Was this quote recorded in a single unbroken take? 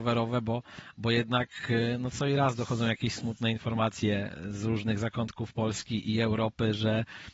yes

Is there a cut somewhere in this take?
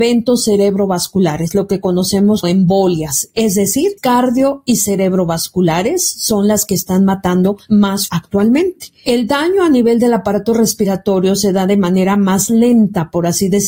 yes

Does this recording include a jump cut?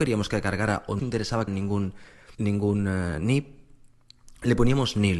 yes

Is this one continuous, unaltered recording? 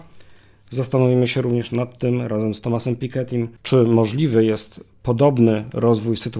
no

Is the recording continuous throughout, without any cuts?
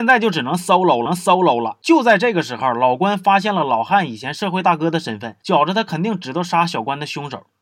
no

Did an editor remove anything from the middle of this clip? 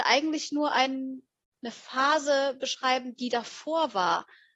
no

